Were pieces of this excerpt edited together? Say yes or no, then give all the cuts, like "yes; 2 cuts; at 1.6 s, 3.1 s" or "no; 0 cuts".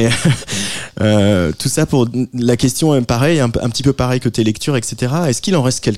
no; 0 cuts